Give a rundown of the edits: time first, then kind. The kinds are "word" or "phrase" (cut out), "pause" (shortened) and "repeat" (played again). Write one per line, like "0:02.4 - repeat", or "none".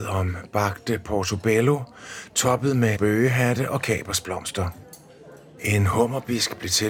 0:03.0 - word